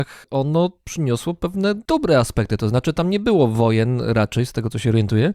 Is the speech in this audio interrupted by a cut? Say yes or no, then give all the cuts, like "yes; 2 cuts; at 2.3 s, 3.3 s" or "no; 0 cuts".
no; 0 cuts